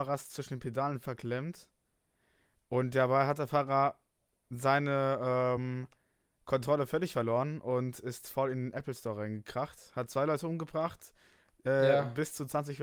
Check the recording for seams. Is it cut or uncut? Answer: uncut